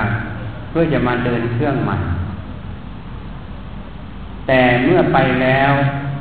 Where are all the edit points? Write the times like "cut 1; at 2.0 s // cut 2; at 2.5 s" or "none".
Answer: none